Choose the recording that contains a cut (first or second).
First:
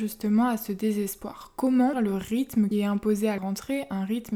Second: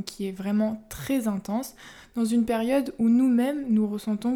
first